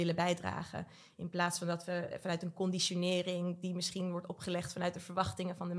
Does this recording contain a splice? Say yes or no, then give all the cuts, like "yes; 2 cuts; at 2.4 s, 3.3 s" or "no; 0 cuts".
no; 0 cuts